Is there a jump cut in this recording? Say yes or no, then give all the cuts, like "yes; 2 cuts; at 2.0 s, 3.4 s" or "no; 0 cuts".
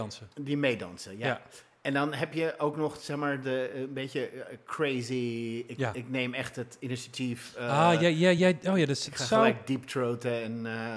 no; 0 cuts